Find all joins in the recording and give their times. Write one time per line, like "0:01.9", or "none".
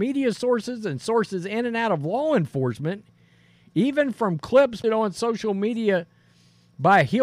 0:04.8